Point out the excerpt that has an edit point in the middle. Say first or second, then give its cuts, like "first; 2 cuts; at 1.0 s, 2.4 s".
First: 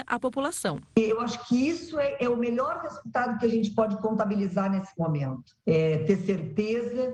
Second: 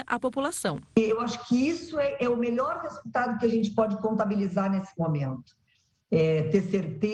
first; 1 cut; at 5.6 s